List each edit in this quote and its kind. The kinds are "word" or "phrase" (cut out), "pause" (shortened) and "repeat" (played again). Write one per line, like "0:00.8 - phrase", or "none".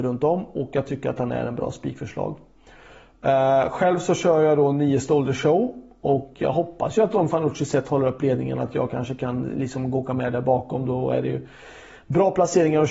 none